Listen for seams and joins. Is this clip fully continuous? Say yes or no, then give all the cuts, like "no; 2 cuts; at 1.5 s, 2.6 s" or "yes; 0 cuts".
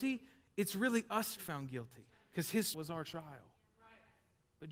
no; 3 cuts; at 1.4 s, 2.1 s, 2.7 s